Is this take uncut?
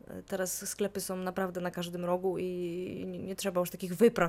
yes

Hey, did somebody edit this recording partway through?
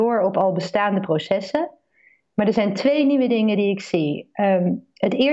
no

